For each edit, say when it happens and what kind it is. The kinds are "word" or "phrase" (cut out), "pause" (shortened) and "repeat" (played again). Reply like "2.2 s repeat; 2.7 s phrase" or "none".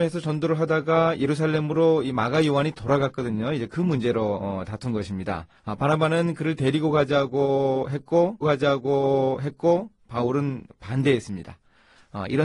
5.6 s pause; 8.4 s repeat

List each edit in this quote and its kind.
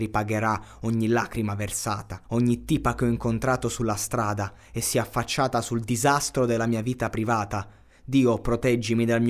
2.2 s pause

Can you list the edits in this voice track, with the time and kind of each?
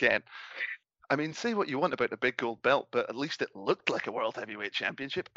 none

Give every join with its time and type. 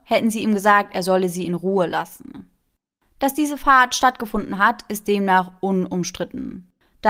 none

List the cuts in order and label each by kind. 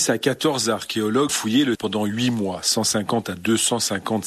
1.3 s word; 1.7 s word

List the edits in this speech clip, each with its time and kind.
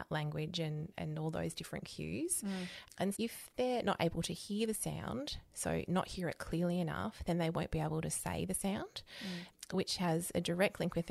3.1 s word

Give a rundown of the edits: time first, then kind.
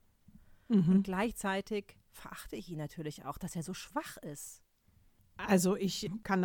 none

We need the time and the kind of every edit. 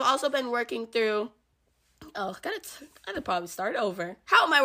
none

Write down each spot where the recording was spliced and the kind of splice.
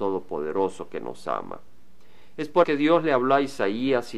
2.6 s word

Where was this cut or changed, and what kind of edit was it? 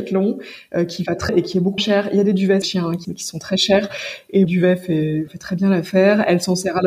1.3 s word; 1.8 s word; 2.6 s word; 3.0 s word; 4.4 s word; 5.3 s word

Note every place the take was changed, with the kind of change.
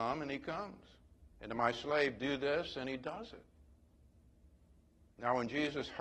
1.3 s pause

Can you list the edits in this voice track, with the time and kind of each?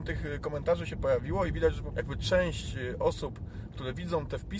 1.9 s word

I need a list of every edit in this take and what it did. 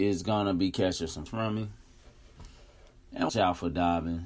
1.3 s word; 3.3 s word

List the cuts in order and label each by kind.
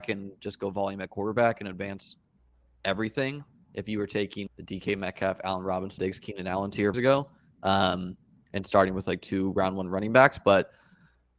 4.5 s word; 6.0 s word; 6.9 s phrase

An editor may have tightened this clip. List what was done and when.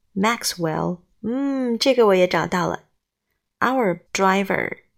1.1 s pause; 4.1 s word

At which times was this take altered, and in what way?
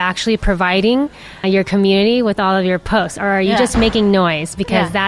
1.4 s word

